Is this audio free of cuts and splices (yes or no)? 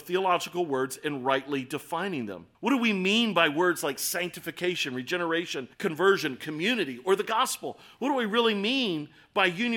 no